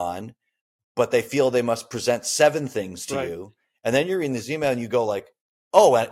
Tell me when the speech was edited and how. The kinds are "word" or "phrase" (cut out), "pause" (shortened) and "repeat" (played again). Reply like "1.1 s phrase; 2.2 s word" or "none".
none